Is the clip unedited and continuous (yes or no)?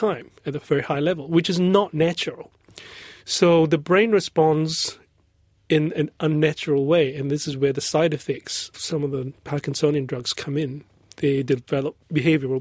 no